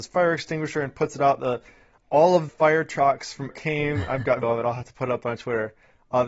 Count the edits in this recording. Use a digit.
3